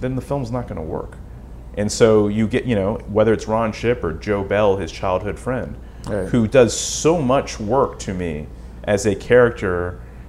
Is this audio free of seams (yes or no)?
yes